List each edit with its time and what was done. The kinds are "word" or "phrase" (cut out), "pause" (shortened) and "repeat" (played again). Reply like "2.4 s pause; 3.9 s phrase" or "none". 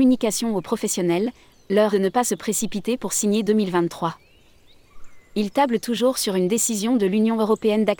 1.9 s phrase; 3.5 s phrase

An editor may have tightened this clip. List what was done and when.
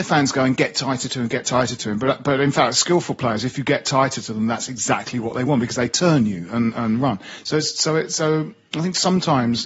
none

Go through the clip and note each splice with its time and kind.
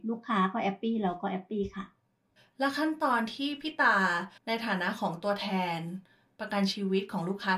4.4 s pause

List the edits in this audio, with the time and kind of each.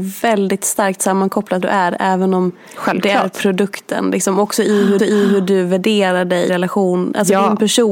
1.6 s phrase; 5.0 s repeat; 6.5 s word

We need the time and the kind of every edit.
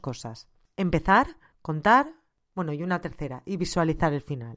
none

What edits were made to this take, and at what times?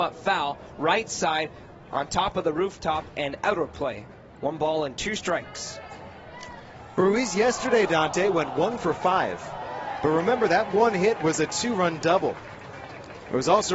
none

